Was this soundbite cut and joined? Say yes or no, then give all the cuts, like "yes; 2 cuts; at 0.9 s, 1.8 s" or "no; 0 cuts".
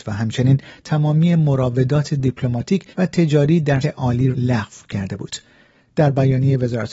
yes; 3 cuts; at 2.9 s, 3.8 s, 4.3 s